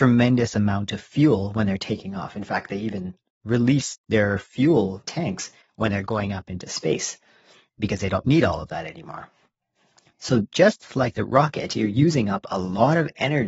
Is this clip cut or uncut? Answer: uncut